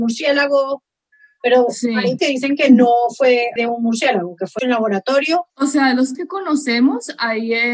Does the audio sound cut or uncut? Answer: cut